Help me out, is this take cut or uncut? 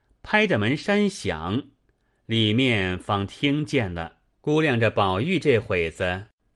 cut